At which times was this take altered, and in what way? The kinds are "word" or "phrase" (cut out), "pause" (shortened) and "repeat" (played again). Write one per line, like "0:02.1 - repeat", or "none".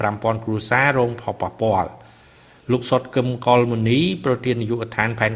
none